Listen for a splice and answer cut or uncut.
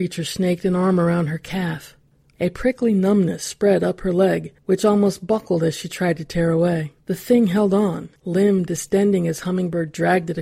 cut